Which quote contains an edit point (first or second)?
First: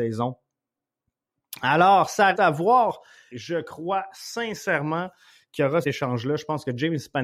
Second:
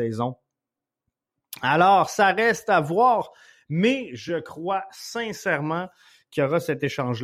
first